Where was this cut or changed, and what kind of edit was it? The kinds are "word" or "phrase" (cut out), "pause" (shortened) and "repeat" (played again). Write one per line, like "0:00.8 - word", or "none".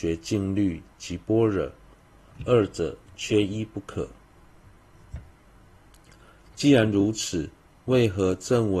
none